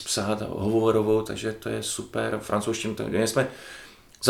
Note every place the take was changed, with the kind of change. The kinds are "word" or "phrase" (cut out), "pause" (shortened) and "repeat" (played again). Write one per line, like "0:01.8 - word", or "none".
none